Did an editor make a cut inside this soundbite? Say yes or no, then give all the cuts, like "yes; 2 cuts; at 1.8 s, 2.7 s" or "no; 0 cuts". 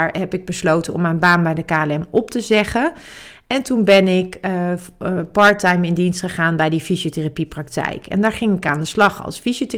no; 0 cuts